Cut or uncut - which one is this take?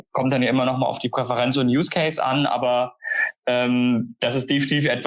uncut